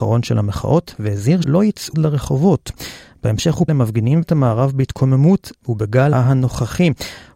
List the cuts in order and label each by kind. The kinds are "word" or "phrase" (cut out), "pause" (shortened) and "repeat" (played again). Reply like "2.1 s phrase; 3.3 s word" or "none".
1.4 s word; 1.9 s word; 3.7 s word; 4.2 s word; 6.1 s word